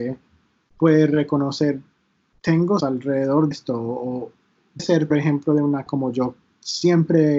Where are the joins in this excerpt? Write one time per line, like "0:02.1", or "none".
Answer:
0:02.8
0:03.5
0:04.8
0:05.1
0:05.9